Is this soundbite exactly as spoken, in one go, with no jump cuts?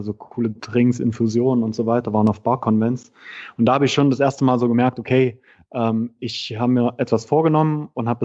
yes; 0 cuts

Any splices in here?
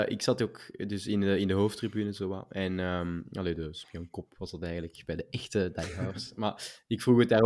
no; 0 cuts

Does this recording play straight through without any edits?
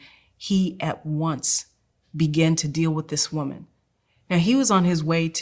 yes; 0 cuts

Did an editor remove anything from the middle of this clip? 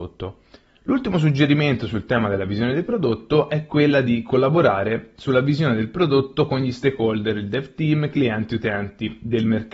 no; 0 cuts

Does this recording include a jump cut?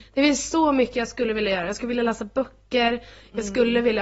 no; 0 cuts

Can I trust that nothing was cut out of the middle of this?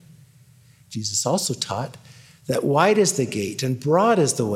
yes; 0 cuts

